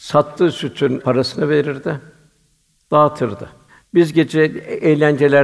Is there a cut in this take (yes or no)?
yes